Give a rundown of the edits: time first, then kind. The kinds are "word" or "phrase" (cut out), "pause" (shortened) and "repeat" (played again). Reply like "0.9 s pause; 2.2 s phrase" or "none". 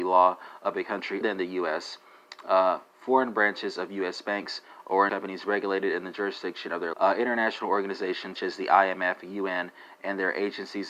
1.2 s word; 5.1 s word; 6.9 s word; 8.4 s word